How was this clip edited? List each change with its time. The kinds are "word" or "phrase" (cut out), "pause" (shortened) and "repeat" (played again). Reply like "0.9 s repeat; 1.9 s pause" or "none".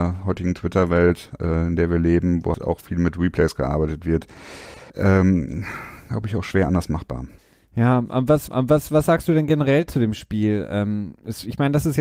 2.5 s word; 4.9 s pause; 7.4 s pause; 8.5 s repeat